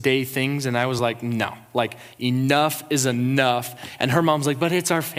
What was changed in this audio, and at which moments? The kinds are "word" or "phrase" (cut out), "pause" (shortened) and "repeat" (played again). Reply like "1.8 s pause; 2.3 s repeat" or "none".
none